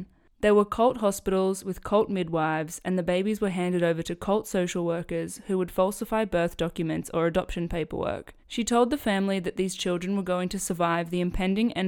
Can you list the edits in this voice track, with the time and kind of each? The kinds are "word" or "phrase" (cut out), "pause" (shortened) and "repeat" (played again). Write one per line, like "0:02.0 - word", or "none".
0:08.4 - pause